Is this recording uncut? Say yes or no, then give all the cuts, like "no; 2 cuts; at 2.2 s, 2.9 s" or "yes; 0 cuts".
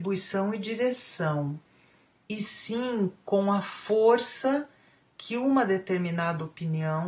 yes; 0 cuts